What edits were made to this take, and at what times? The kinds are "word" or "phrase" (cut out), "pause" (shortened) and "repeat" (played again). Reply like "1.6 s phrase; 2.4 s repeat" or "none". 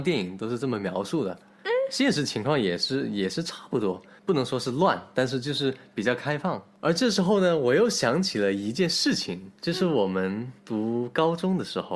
9.6 s pause; 10.6 s pause